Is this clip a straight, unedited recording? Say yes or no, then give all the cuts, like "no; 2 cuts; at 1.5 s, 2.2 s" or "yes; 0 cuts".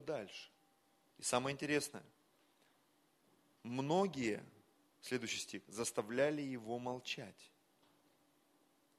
yes; 0 cuts